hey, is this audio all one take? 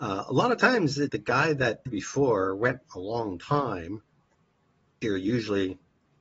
no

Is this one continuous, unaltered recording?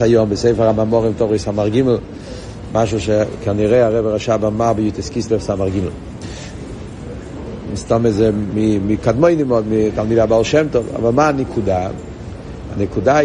yes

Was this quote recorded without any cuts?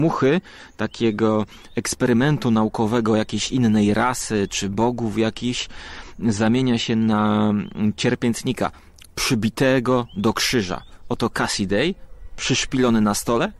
yes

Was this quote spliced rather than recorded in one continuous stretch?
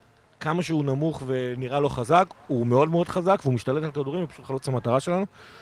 no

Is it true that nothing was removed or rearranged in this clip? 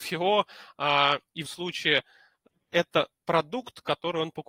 no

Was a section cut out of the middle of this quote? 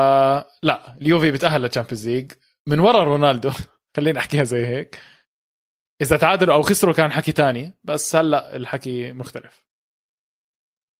no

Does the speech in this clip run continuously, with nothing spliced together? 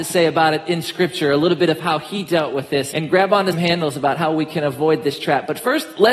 no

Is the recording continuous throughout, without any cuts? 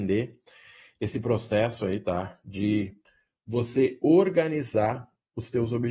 yes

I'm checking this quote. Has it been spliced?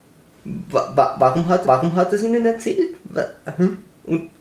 yes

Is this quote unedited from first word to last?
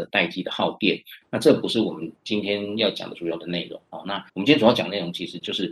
no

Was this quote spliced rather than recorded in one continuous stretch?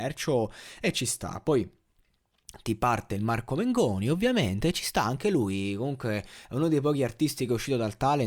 no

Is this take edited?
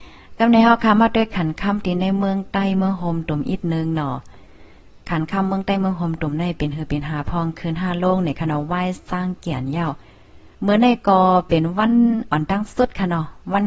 yes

